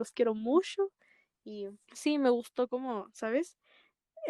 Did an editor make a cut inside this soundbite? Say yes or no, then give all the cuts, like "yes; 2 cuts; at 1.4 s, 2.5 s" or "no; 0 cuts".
yes; 1 cut; at 1.8 s